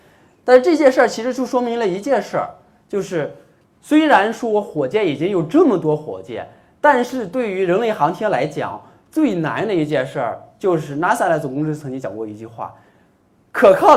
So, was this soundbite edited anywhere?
no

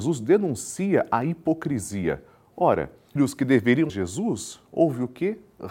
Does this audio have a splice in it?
yes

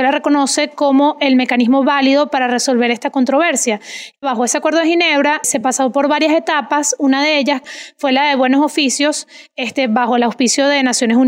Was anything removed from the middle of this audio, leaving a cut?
no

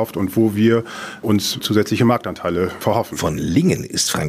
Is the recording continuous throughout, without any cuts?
yes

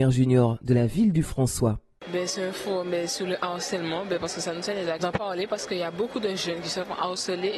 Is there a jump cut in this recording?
yes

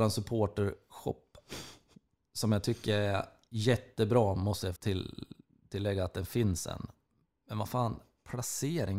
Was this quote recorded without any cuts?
no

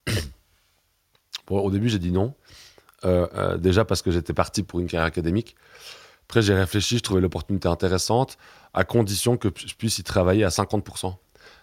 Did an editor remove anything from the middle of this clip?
no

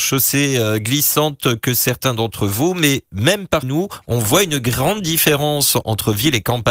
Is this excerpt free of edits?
no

